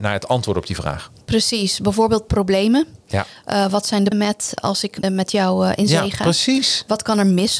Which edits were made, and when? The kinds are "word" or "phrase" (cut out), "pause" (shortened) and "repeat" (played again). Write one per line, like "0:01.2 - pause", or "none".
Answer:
0:04.1 - word
0:04.6 - word
0:05.0 - phrase